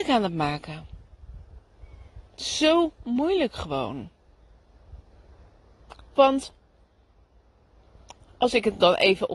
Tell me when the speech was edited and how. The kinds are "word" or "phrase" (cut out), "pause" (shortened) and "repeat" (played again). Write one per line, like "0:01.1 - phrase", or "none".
0:02.3 - pause
0:05.4 - pause